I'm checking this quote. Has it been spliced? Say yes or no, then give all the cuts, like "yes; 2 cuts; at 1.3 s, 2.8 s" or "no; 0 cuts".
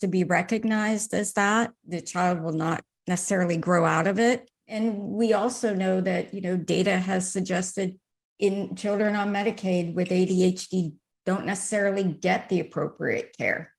no; 0 cuts